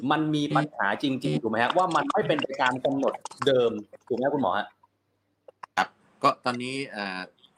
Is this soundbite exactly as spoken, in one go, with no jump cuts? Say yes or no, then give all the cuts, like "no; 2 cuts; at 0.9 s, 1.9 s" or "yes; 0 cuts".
no; 1 cut; at 5.7 s